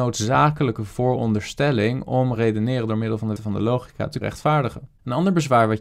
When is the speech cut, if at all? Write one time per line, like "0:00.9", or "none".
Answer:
0:02.4
0:03.4
0:04.2